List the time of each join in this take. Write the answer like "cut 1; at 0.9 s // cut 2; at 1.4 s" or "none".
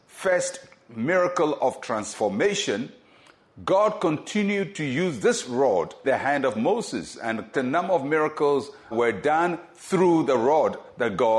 cut 1; at 6.0 s // cut 2; at 7.5 s // cut 3; at 8.9 s